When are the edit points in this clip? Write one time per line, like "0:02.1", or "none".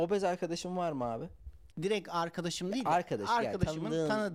0:01.7